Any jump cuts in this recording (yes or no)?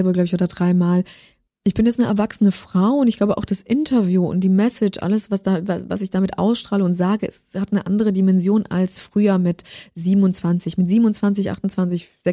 no